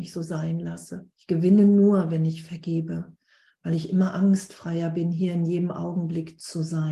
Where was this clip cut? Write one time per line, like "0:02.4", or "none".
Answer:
0:01.1